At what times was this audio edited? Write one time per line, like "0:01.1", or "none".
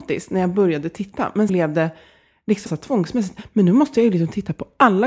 0:01.5
0:02.7

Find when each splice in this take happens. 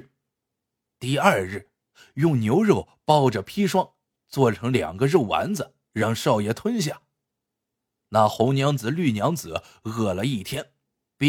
0:05.8

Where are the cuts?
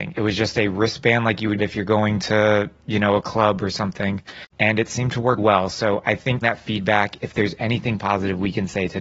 0:01.6
0:04.5
0:05.4
0:06.4

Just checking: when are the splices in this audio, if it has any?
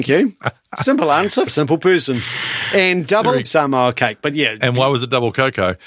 0:01.5
0:03.4

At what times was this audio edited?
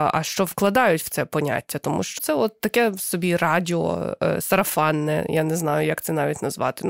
0:02.2

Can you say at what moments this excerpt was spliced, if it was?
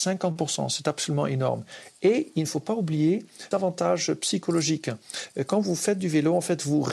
0:03.5

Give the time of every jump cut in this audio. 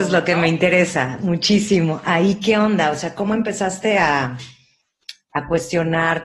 none

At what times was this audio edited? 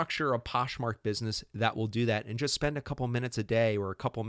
none

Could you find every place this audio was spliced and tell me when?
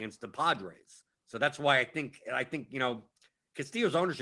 0:01.1

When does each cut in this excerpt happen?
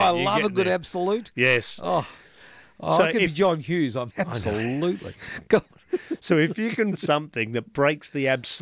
0:04.1
0:07.0

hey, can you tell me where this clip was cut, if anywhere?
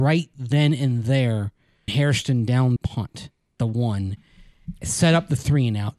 0:01.9
0:02.8
0:03.6

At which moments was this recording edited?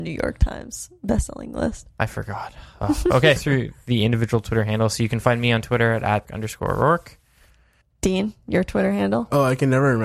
0:03.4
0:06.2
0:07.8

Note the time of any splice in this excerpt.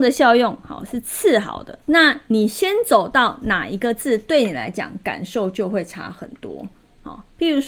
0:01.8

